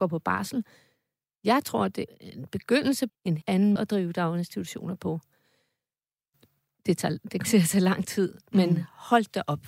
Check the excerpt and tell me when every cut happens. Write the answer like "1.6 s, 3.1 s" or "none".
2.1 s, 3.1 s, 3.4 s, 3.8 s, 7.4 s